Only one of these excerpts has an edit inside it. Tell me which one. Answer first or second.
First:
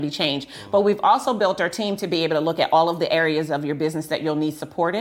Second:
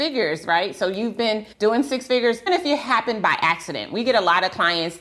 second